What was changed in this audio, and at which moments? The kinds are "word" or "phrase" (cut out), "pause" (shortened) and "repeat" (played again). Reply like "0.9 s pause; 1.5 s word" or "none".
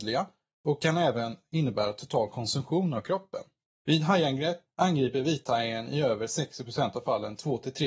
none